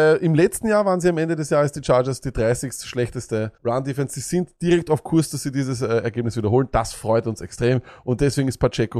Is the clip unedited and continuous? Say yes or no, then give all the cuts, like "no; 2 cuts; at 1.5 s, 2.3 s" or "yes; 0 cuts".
no; 1 cut; at 3.6 s